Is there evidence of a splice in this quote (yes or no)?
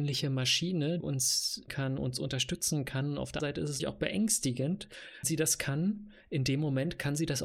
yes